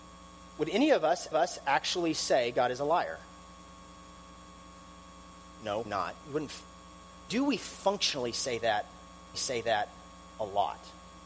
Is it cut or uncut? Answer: cut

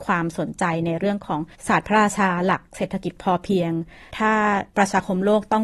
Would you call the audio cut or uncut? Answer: cut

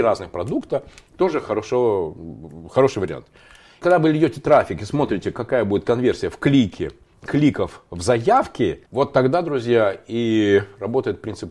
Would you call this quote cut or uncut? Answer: cut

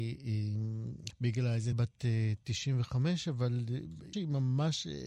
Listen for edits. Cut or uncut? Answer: cut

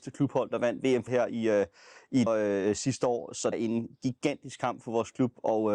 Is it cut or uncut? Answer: cut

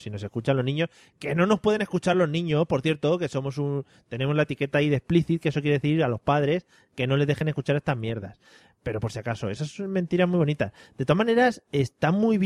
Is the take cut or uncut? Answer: uncut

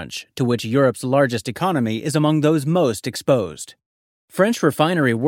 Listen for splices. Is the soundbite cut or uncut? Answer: cut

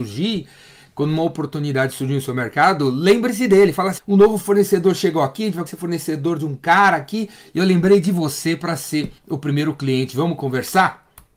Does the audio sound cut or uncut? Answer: cut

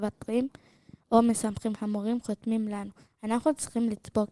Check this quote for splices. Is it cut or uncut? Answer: cut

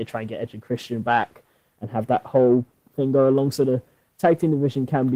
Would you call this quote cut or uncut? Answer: uncut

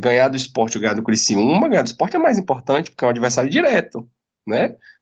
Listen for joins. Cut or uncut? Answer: uncut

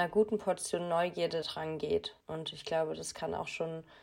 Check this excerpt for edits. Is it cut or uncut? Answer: cut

